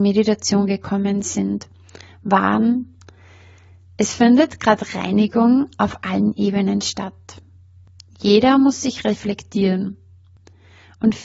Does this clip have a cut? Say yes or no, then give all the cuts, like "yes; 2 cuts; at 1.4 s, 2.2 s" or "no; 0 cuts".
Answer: no; 0 cuts